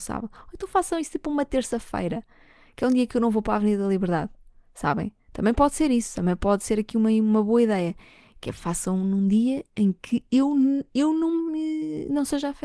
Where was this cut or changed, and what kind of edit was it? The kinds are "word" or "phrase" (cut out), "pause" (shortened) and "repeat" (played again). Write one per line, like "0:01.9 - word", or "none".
none

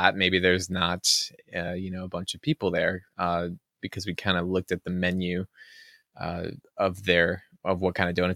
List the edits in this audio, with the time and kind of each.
none

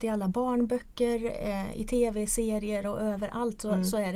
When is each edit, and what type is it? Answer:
0:02.8 - phrase

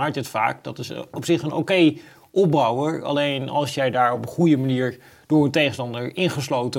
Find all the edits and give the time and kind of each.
none

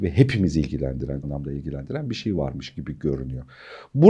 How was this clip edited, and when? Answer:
0:01.2 - word

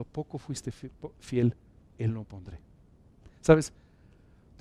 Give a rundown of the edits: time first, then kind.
0:01.7 - pause
0:02.2 - phrase

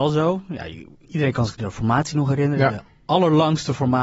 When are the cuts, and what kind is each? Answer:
none

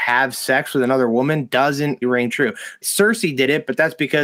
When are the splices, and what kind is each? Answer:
0:02.0 - word
0:02.8 - word

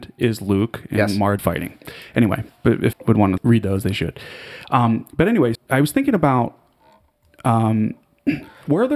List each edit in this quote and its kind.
0:01.4 - word
0:02.9 - word
0:03.4 - word
0:05.5 - word

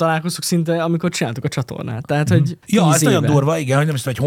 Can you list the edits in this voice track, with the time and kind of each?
0:02.6 - pause

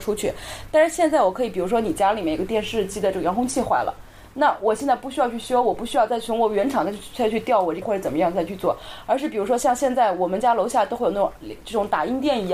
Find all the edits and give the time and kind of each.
0:07.8 - word

